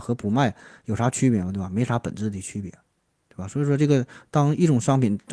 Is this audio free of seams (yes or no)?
yes